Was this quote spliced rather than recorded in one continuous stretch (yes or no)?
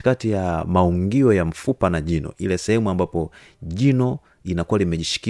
no